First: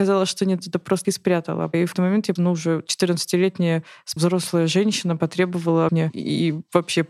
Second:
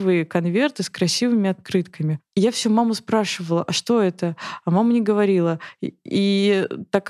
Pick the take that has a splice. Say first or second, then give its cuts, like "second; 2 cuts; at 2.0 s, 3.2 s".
first; 5 cuts; at 1.0 s, 1.9 s, 2.4 s, 4.2 s, 5.9 s